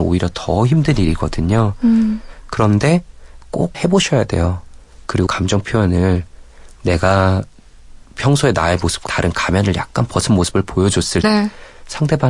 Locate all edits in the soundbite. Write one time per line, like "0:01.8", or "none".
0:03.7
0:05.3
0:09.1
0:11.2